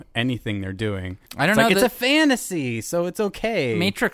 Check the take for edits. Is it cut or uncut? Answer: cut